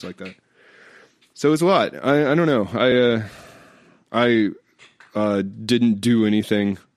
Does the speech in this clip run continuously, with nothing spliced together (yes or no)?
yes